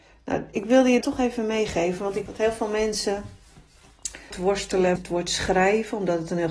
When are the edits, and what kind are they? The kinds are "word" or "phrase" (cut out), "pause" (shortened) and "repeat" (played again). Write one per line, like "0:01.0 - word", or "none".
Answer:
0:01.0 - word
0:02.3 - word
0:04.3 - word
0:05.0 - word

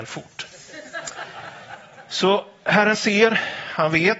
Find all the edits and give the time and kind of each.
0:02.9 - word

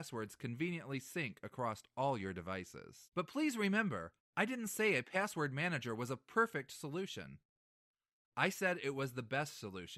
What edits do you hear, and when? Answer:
0:03.0 - pause

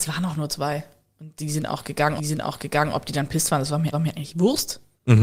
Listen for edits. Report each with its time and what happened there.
0:02.2 - repeat
0:03.9 - repeat

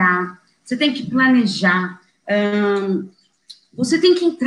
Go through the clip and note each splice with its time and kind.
none

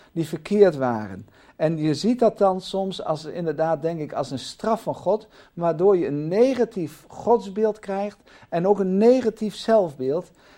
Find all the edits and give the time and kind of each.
none

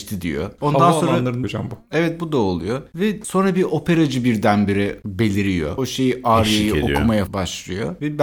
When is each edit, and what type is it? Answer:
0:01.4 - word
0:05.8 - phrase
0:07.3 - word

